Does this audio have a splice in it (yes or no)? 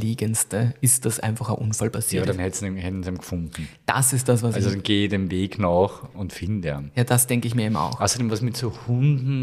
yes